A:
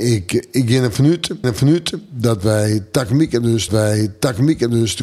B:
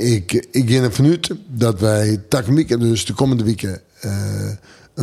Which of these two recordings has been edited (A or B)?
A